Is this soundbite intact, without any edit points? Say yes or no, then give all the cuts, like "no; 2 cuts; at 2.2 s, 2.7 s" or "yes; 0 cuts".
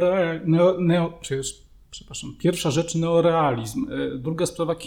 yes; 0 cuts